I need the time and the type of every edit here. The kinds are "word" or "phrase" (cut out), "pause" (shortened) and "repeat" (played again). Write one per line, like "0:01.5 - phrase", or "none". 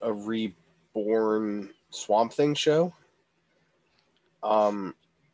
none